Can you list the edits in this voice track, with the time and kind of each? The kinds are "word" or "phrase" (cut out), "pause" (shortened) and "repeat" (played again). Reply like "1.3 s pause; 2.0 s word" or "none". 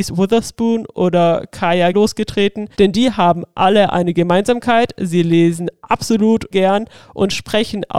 1.9 s word; 2.7 s pause; 6.5 s word